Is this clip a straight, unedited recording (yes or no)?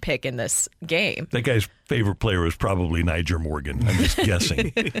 yes